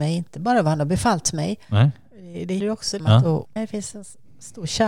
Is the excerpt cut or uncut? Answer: cut